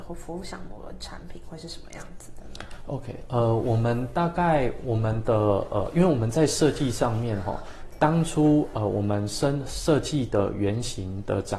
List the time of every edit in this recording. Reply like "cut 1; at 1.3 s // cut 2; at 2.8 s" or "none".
none